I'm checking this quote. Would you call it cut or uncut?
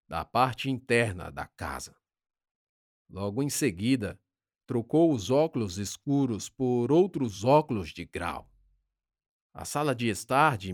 uncut